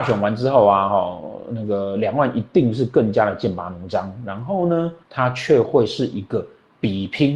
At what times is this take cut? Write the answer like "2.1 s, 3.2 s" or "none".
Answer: 5.0 s